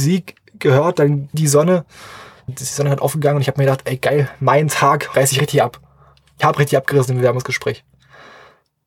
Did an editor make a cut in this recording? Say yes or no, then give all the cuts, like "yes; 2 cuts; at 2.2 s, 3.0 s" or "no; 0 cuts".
yes; 4 cuts; at 1.3 s, 2.5 s, 5.1 s, 6.4 s